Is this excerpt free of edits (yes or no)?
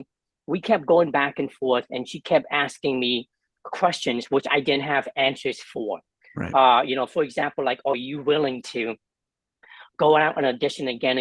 yes